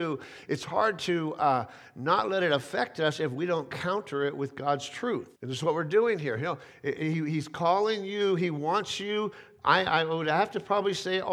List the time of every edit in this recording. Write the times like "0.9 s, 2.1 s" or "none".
5.4 s